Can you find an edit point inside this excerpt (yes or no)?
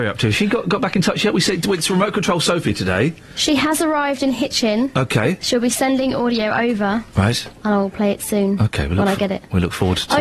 no